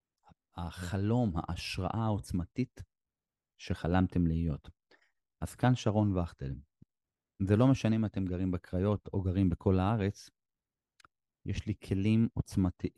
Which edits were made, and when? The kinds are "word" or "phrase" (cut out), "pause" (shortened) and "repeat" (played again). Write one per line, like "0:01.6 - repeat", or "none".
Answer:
none